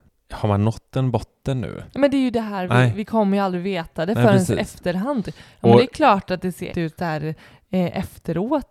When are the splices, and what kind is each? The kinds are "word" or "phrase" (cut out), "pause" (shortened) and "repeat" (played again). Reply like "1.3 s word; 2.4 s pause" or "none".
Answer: 1.9 s pause; 6.7 s word